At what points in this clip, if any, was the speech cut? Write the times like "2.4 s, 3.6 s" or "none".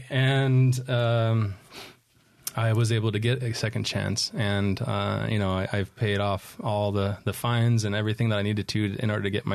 none